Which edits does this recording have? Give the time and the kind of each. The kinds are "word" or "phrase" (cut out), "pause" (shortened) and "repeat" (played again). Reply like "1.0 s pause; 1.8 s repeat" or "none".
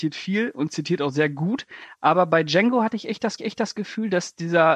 3.4 s repeat